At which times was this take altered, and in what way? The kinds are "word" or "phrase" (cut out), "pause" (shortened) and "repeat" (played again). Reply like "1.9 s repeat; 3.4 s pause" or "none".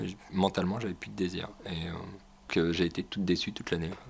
2.5 s word